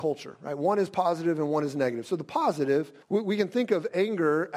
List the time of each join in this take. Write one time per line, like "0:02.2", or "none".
0:03.0

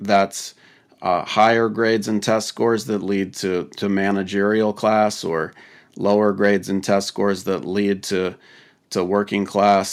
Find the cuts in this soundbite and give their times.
none

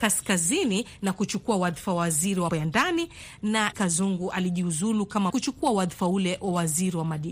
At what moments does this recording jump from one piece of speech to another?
0:02.5
0:03.7
0:05.3

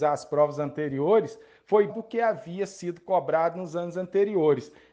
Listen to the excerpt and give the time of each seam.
0:01.9

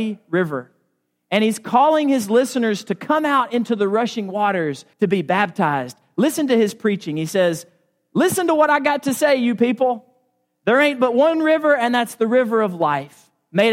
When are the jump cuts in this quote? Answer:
0:04.9

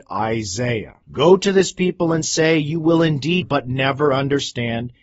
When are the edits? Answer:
0:01.0
0:03.4

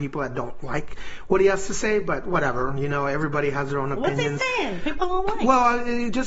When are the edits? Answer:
none

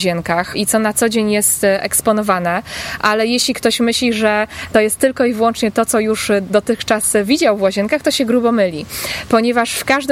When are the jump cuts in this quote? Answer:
none

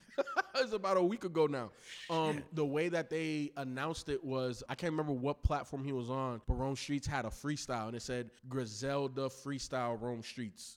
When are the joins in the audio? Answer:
0:04.7
0:06.4
0:08.4

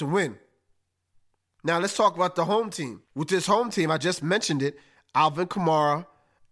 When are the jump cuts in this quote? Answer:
0:03.0

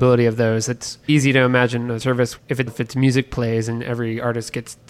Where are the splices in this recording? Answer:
0:01.1
0:02.0
0:02.4
0:02.7

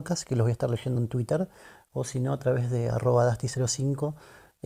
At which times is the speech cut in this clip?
none

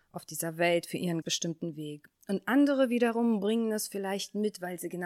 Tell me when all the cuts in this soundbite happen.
0:01.2

